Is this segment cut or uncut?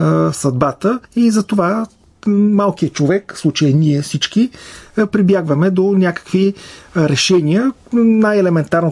cut